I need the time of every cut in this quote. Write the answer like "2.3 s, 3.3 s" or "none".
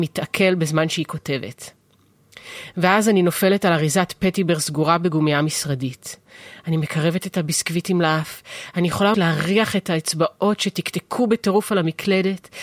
9.1 s